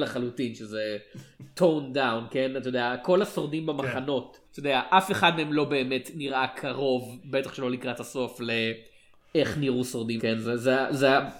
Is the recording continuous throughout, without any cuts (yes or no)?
no